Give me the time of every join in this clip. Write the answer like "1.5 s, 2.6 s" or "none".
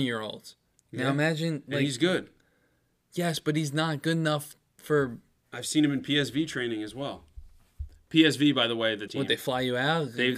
9.1 s